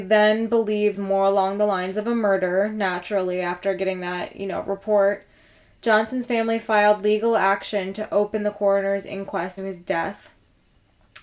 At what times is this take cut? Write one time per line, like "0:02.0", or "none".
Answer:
0:01.0
0:09.6